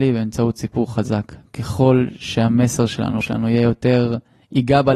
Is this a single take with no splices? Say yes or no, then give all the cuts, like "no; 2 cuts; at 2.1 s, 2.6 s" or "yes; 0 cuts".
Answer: no; 1 cut; at 3.2 s